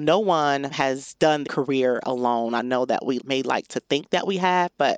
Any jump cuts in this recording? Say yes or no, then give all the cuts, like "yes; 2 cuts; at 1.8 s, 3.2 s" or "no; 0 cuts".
yes; 1 cut; at 1.4 s